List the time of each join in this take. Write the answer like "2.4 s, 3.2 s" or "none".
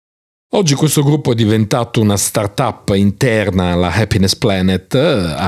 none